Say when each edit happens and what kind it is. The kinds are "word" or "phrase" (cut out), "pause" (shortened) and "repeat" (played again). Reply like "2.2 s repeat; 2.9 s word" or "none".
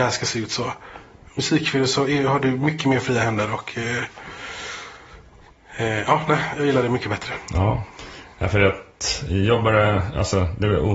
none